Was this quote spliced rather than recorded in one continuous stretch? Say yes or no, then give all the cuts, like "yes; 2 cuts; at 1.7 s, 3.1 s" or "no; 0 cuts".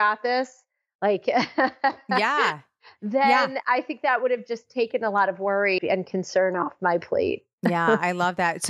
yes; 1 cut; at 5.8 s